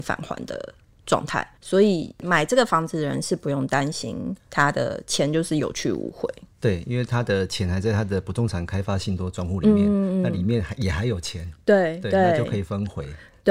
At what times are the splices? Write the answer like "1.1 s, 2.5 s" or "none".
1.6 s